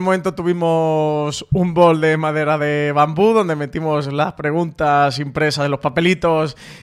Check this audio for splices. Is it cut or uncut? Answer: uncut